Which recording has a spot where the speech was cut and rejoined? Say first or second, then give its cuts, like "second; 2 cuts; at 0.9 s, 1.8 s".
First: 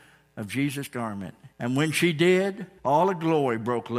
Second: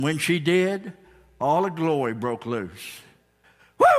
first; 2 cuts; at 1.5 s, 2.8 s